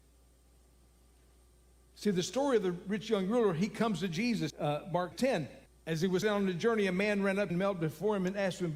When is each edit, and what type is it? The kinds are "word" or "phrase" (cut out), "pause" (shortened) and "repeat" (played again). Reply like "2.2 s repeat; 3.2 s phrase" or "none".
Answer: 4.5 s word; 5.1 s word; 5.7 s pause; 6.2 s word; 7.5 s phrase